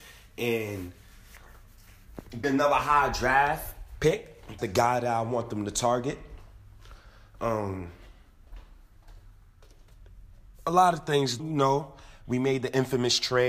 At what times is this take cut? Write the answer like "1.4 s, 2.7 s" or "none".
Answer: 2.4 s, 4.6 s, 11.4 s